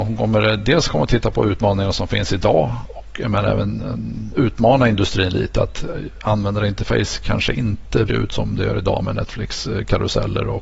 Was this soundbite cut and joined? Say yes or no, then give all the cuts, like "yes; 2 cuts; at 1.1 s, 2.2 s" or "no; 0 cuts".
yes; 1 cut; at 8.1 s